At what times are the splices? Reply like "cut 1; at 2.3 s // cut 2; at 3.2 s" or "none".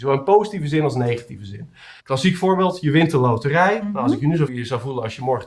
cut 1; at 2.0 s // cut 2; at 4.5 s